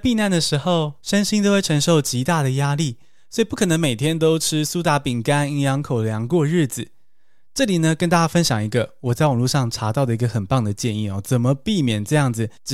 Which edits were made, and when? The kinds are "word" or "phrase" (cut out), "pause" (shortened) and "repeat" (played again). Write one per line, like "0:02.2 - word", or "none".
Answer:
none